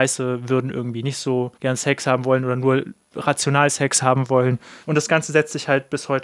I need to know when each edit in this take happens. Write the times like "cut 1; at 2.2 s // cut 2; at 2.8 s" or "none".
cut 1; at 1.6 s // cut 2; at 4.8 s